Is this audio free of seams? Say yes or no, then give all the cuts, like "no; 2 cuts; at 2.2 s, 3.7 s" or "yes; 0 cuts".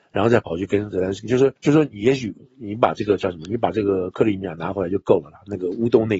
no; 1 cut; at 1.6 s